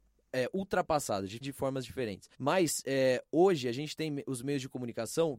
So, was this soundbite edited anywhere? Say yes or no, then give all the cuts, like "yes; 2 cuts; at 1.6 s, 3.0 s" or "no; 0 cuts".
yes; 2 cuts; at 1.4 s, 2.3 s